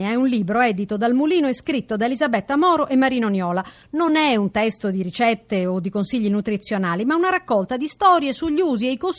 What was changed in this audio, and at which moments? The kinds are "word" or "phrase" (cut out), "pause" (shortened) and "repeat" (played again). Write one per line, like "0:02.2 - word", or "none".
none